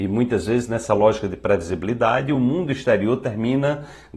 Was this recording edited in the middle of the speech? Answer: no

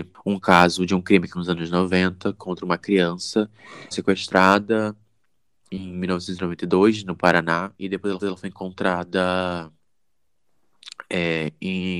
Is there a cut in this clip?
yes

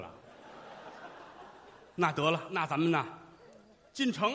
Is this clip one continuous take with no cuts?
yes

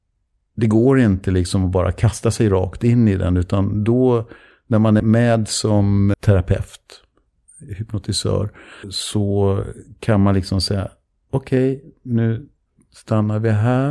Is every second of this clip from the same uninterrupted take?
no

